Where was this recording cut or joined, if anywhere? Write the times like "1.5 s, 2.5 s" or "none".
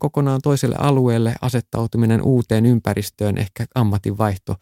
none